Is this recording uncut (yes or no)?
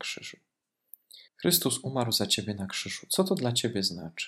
no